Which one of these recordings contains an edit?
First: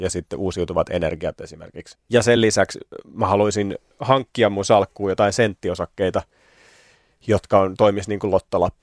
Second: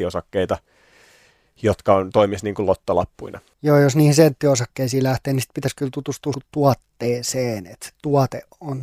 second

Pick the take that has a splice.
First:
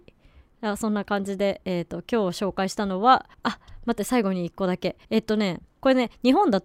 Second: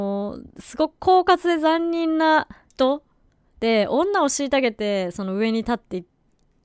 first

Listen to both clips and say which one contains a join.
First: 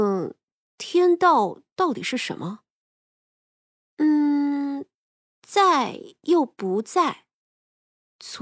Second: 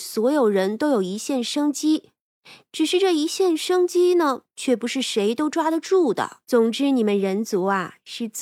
second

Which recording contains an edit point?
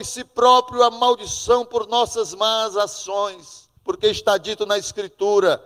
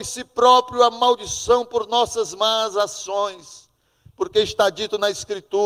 first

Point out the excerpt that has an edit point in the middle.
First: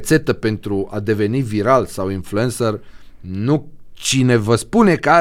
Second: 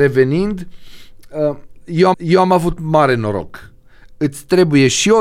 second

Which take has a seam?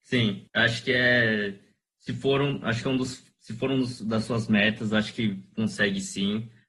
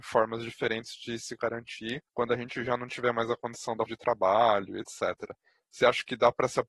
second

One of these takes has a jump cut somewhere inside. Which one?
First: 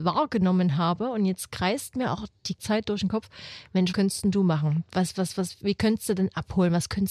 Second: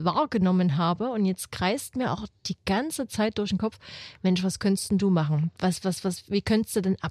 first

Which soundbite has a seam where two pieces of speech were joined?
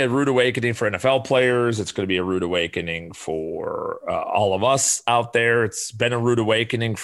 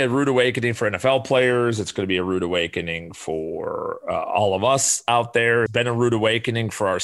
second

